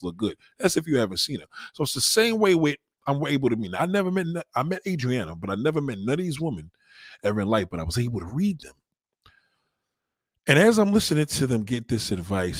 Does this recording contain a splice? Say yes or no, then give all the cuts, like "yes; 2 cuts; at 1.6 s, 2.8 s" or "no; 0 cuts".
no; 0 cuts